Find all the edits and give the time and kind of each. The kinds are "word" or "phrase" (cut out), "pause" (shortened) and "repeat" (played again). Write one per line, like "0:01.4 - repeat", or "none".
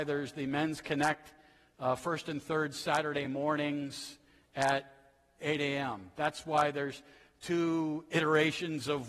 none